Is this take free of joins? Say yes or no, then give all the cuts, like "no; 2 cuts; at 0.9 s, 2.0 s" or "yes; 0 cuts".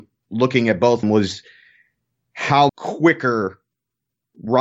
no; 2 cuts; at 1.0 s, 2.7 s